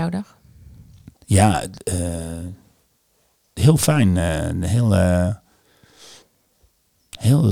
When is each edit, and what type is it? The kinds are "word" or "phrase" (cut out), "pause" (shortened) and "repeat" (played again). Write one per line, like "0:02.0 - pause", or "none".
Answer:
none